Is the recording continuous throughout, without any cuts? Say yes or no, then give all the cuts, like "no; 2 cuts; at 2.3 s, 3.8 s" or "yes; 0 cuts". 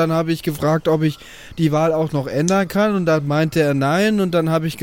yes; 0 cuts